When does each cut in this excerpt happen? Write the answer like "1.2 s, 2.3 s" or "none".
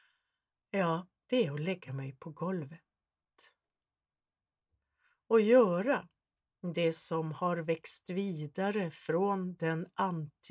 none

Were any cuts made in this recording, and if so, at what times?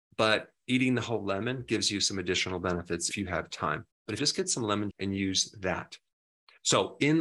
3.1 s, 4.2 s, 4.9 s

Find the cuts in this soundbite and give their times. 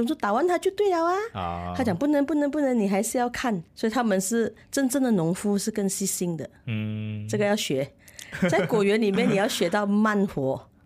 3.7 s, 4.6 s

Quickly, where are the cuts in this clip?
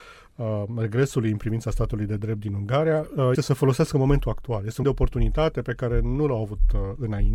3.3 s, 4.8 s

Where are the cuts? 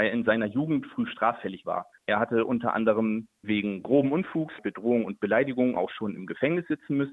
1.6 s, 3.4 s, 4.6 s

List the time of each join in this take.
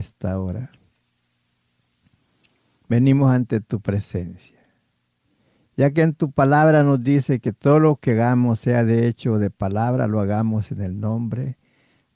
none

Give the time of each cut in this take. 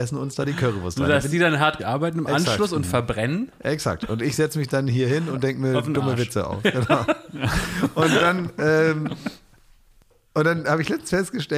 1.8 s

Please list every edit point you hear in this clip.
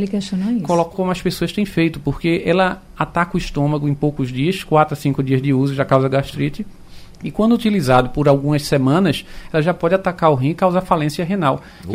0.9 s

